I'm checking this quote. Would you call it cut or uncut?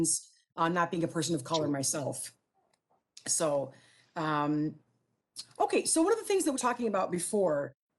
cut